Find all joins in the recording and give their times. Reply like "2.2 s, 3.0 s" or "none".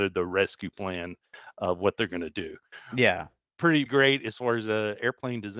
3.9 s